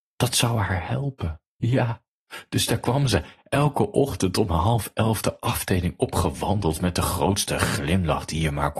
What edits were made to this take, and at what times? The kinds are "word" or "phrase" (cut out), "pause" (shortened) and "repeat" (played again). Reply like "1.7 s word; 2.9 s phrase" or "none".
1.5 s pause